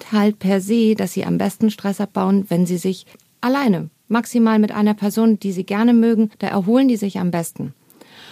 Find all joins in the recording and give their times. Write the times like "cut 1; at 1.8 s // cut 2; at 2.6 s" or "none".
cut 1; at 3.1 s // cut 2; at 6.3 s